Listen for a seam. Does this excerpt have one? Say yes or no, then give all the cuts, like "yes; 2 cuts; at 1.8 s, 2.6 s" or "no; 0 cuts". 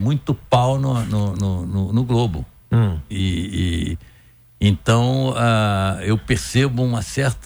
no; 0 cuts